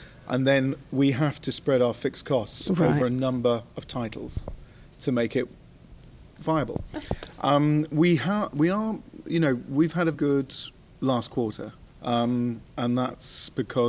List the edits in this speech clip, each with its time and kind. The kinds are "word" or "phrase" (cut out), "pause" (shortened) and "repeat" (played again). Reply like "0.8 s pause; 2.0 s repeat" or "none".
6.3 s pause; 10.1 s word; 10.8 s pause; 11.9 s pause